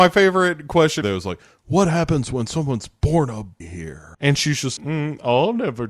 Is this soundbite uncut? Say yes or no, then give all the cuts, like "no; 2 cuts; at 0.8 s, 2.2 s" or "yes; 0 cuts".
no; 4 cuts; at 1.0 s, 3.6 s, 4.1 s, 4.8 s